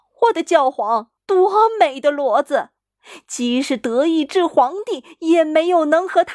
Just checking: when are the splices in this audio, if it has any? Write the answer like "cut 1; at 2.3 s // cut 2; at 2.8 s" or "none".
cut 1; at 1.2 s